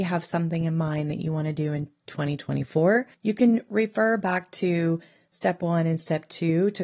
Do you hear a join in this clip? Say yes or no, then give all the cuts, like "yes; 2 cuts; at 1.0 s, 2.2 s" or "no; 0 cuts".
no; 0 cuts